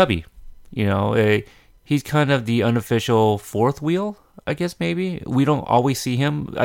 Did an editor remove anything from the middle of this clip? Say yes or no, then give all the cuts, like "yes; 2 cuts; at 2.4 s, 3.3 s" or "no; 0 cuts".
no; 0 cuts